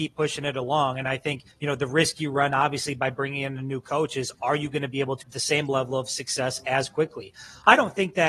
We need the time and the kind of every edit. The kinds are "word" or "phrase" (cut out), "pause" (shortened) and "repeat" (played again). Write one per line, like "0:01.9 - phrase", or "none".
0:01.5 - pause
0:05.2 - word

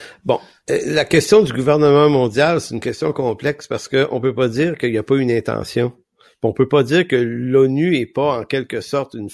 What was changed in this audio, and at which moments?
none

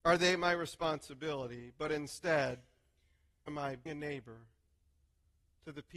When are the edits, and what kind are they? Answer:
0:03.5 - word
0:03.9 - word

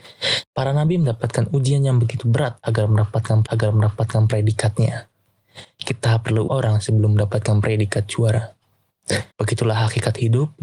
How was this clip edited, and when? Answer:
0:03.4 - repeat
0:06.5 - phrase
0:09.3 - pause

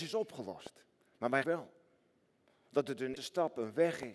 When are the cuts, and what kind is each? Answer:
0:01.4 - word
0:03.2 - word

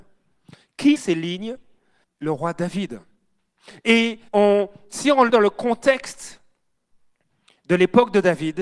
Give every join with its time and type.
0:01.0 - word
0:02.0 - word
0:04.3 - pause
0:05.3 - word

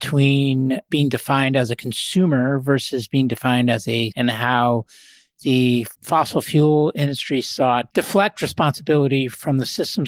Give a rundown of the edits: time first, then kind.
0:04.1 - word
0:05.9 - pause
0:07.9 - word

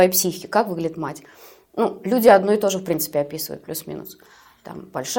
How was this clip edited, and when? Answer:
none

